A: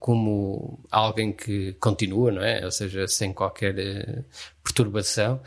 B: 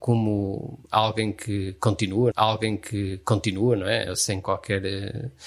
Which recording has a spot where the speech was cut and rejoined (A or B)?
B